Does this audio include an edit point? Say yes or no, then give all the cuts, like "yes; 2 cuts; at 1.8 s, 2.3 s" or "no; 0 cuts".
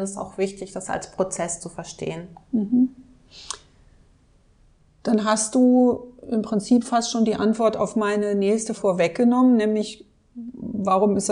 yes; 1 cut; at 8.8 s